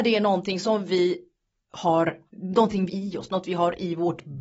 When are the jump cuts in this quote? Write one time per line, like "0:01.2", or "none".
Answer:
0:02.3
0:02.9